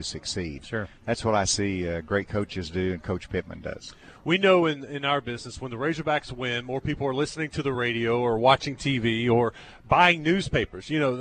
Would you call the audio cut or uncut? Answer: uncut